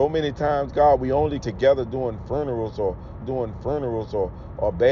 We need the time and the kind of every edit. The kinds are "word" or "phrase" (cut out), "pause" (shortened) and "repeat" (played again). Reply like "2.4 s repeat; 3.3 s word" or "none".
1.4 s word; 3.2 s repeat